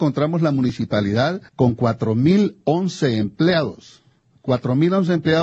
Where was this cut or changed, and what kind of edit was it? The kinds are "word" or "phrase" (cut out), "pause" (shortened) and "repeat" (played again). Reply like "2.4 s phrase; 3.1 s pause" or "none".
1.5 s pause